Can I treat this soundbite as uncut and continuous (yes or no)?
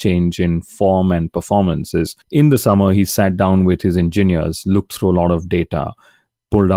no